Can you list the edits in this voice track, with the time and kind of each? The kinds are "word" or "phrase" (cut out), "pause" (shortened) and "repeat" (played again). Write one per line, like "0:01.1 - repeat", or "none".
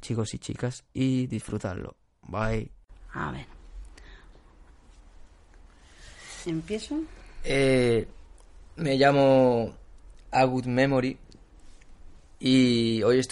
none